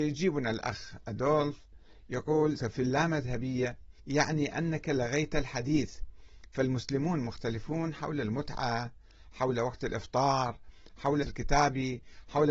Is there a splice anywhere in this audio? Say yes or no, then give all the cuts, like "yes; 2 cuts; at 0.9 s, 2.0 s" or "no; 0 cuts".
yes; 3 cuts; at 2.6 s, 4.0 s, 11.2 s